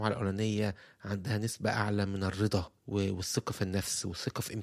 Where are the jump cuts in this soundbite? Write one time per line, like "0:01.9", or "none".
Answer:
0:02.8